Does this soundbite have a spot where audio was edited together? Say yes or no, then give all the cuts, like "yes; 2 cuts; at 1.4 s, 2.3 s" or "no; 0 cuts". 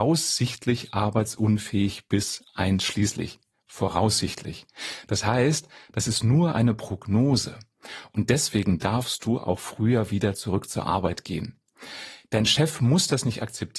no; 0 cuts